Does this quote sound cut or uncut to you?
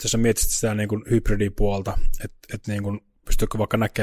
uncut